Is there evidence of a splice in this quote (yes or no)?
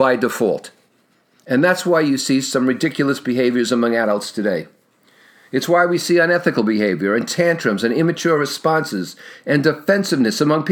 no